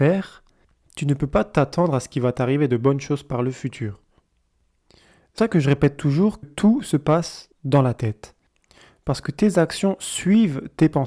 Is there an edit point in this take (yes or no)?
yes